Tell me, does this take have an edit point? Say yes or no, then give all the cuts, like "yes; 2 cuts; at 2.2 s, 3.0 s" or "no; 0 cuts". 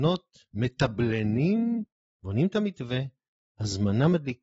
no; 0 cuts